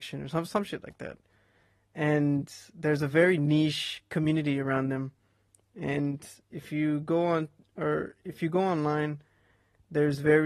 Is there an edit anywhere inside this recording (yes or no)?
no